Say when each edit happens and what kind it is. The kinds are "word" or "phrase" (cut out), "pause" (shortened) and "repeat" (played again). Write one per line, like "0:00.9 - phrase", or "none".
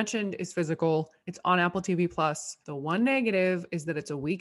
0:01.2 - pause
0:02.6 - pause